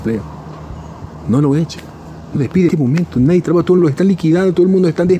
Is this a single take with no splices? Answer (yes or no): no